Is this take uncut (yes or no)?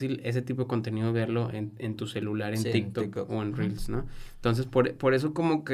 yes